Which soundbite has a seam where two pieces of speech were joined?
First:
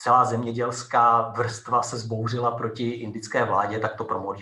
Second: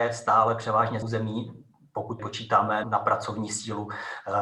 second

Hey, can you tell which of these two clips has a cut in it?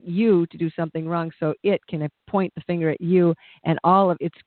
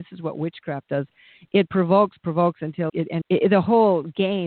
second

